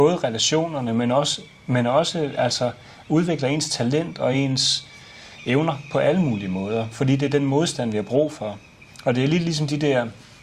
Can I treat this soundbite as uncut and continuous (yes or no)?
yes